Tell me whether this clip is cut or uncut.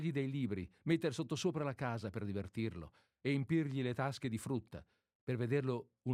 uncut